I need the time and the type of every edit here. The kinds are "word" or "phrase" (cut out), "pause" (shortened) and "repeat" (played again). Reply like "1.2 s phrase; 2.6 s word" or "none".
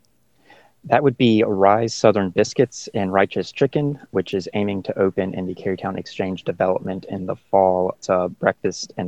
none